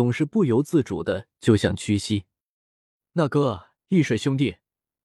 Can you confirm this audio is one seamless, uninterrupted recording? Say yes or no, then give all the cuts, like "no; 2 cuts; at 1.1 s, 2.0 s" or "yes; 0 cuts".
yes; 0 cuts